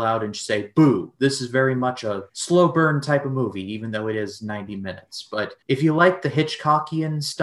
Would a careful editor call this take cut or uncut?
cut